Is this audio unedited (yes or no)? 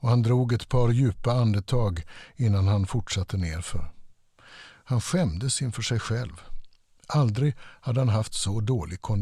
yes